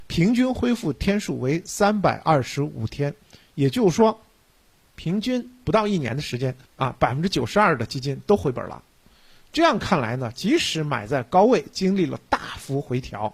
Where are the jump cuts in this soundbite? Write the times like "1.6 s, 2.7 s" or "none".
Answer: none